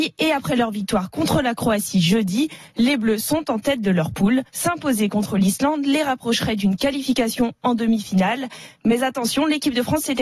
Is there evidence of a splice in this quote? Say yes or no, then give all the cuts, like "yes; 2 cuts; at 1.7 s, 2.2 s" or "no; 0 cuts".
yes; 1 cut; at 4.5 s